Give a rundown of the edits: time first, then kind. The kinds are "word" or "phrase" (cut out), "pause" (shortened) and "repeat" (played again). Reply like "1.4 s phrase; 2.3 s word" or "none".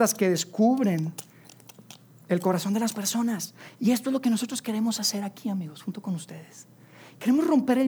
none